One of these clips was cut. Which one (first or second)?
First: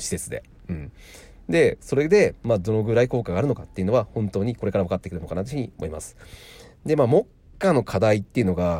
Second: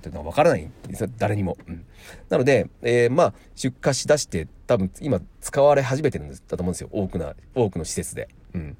second